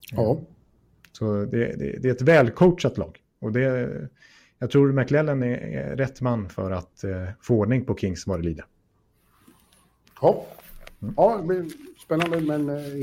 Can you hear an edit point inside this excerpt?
no; 0 cuts

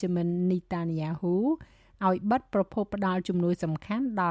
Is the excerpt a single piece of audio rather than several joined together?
yes; 0 cuts

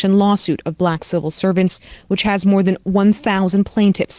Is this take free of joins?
yes; 0 cuts

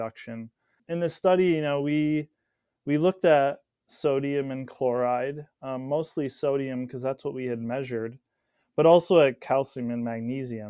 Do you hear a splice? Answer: no; 0 cuts

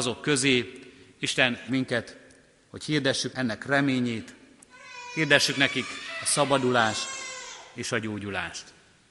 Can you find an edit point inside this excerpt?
yes; 2 cuts; at 1.7 s, 3.3 s

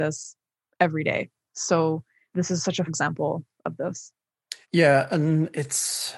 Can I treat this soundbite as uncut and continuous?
no; 4 cuts; at 2.3 s, 2.9 s, 3.6 s, 4.6 s

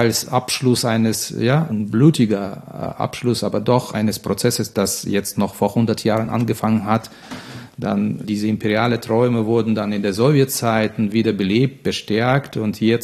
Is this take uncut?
no; 1 cut; at 1.7 s

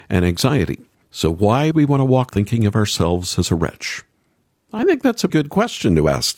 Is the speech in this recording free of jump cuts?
no; 4 cuts; at 1.0 s, 1.7 s, 2.3 s, 5.3 s

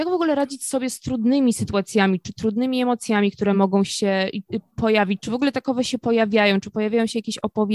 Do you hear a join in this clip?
no; 0 cuts

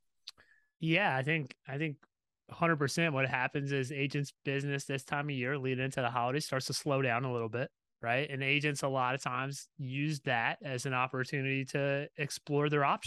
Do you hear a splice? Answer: yes; 1 cut; at 7.8 s

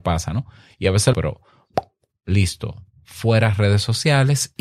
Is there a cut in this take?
yes; 2 cuts; at 1.1 s, 2.9 s

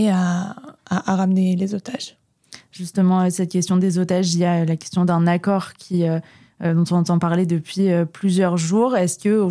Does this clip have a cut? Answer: no; 0 cuts

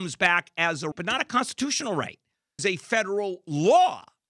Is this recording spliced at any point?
yes; 2 cuts; at 0.9 s, 2.6 s

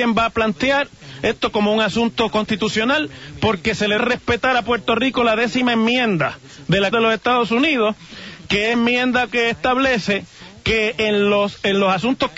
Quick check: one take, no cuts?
no; 3 cuts; at 4.0 s, 6.9 s, 8.7 s

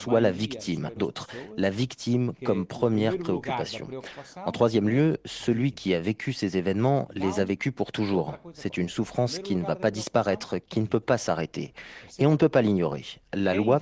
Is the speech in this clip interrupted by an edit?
yes; 1 cut; at 1.0 s

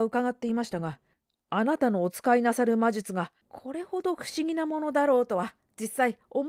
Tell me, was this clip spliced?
no; 0 cuts

